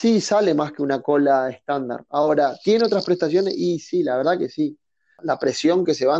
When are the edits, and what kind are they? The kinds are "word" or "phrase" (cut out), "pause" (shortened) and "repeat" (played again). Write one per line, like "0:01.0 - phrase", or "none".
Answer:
none